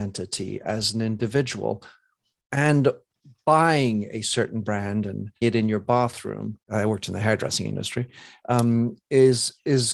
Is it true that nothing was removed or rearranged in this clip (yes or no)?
no